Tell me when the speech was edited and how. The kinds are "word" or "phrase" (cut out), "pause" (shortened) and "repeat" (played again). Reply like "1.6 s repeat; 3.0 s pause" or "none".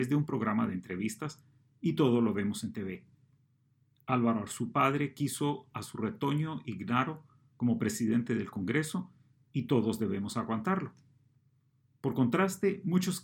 none